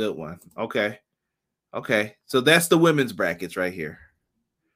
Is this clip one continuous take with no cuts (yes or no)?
yes